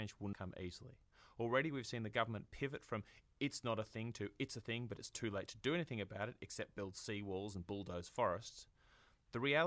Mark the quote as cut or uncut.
uncut